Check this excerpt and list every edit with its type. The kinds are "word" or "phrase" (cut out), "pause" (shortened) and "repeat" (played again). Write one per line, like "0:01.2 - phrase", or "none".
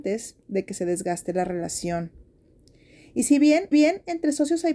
0:03.7 - repeat